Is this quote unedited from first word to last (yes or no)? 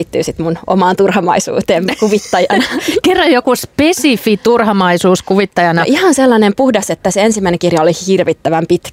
yes